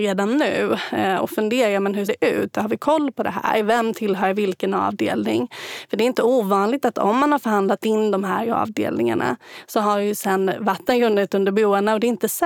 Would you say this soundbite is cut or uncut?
cut